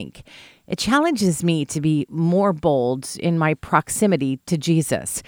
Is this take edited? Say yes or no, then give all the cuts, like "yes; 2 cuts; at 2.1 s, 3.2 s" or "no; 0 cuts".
no; 0 cuts